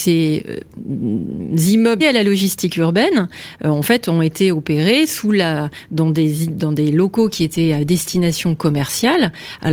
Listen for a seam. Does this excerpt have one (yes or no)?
yes